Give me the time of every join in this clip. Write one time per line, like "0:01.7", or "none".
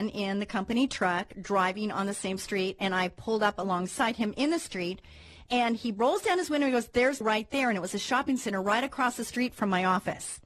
0:07.2